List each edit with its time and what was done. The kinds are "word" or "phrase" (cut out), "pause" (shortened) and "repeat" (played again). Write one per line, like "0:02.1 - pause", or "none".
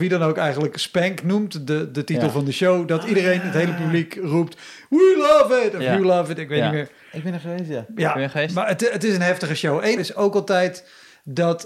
0:10.0 - phrase